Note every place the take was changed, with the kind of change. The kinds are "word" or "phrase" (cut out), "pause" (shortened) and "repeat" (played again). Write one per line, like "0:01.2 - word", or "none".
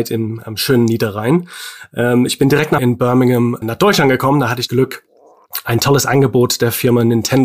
0:02.8 - phrase
0:03.6 - word
0:04.7 - word

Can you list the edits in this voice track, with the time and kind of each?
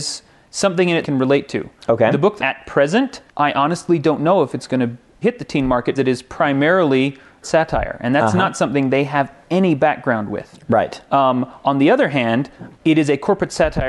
0:01.0 - word
0:02.4 - phrase
0:03.3 - pause
0:05.2 - word
0:06.0 - word
0:07.4 - phrase
0:12.7 - pause

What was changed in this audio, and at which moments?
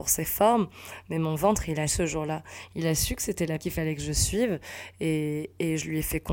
0:01.9 - word
0:03.6 - word

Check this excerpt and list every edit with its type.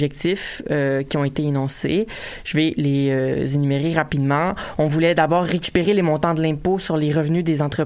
none

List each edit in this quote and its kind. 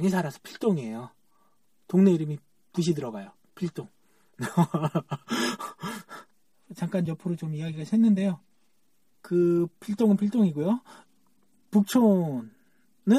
none

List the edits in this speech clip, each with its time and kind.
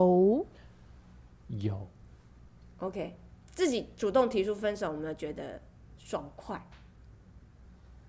none

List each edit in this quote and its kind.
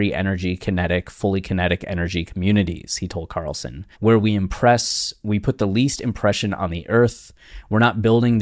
0:03.9 - pause

